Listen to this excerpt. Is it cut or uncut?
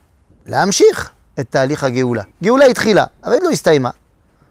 cut